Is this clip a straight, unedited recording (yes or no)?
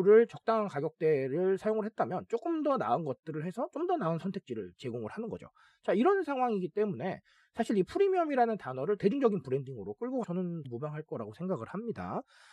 no